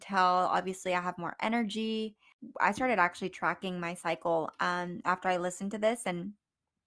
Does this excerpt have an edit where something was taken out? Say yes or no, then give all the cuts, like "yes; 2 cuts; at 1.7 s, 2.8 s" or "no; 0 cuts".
no; 0 cuts